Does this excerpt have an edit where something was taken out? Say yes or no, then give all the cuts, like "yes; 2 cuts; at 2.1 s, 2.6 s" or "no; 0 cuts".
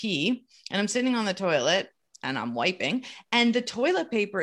no; 0 cuts